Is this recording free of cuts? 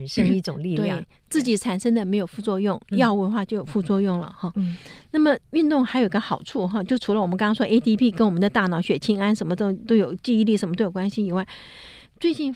yes; 0 cuts

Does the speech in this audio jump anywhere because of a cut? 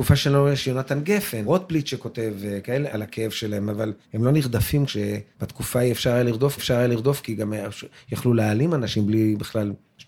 yes; 6 cuts; at 1.4 s, 2.9 s, 4.0 s, 4.9 s, 5.3 s, 6.6 s

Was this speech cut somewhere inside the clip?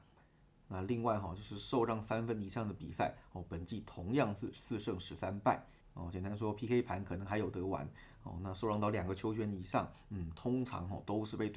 no; 0 cuts

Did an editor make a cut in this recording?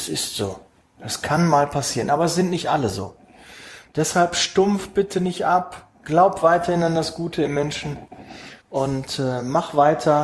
yes; 2 cuts; at 5.9 s, 8.6 s

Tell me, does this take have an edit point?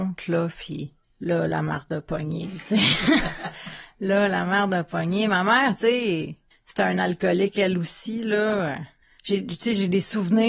no; 0 cuts

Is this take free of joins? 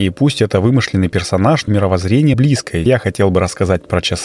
no; 3 cuts; at 1.7 s, 2.3 s, 2.9 s

